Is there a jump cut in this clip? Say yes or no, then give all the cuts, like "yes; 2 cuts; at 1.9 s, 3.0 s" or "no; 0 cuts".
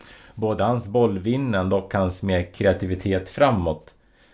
no; 0 cuts